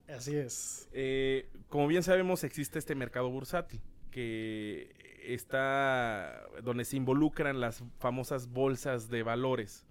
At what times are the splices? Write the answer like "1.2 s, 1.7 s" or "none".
4.0 s